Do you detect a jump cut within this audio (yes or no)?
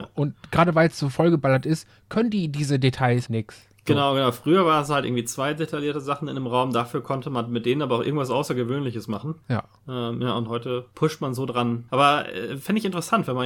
yes